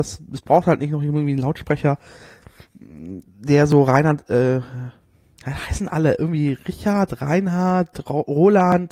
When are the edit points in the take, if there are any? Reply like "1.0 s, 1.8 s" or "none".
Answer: none